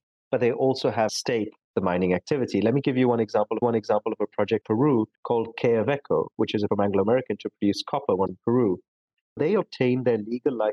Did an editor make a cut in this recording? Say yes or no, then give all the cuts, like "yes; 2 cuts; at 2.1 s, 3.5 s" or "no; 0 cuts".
yes; 8 cuts; at 1.1 s, 1.6 s, 3.6 s, 4.6 s, 5.1 s, 6.7 s, 8.3 s, 9.4 s